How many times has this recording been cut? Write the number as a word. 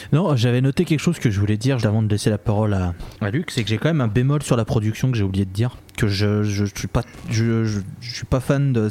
one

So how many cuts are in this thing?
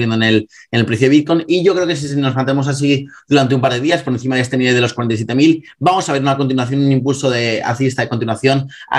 zero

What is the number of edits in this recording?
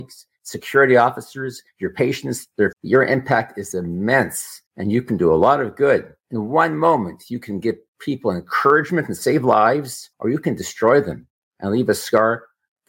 three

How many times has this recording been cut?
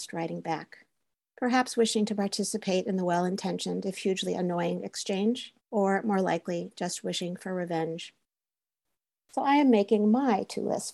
one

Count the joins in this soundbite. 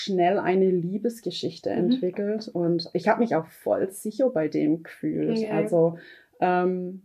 zero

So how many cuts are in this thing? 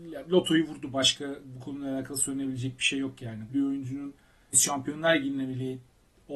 two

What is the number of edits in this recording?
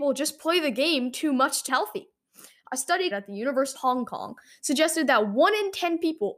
three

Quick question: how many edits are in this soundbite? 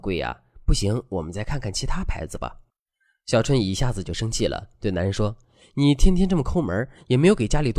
one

